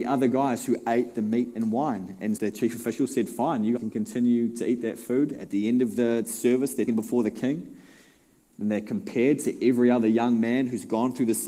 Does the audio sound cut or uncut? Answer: cut